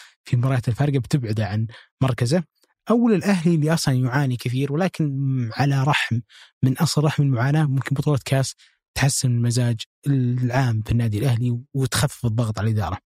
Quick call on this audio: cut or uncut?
uncut